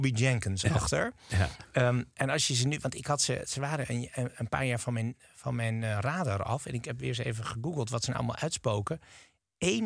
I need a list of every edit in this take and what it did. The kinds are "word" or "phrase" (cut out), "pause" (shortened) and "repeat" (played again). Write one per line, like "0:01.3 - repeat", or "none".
none